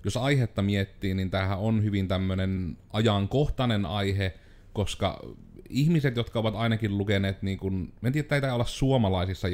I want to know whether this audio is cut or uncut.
uncut